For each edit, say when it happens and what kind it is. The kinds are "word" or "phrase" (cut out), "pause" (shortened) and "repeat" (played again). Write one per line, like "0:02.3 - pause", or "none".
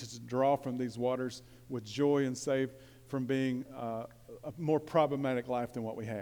none